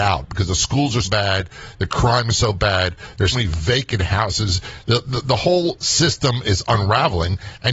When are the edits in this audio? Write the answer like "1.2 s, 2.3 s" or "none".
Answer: 1.0 s, 3.3 s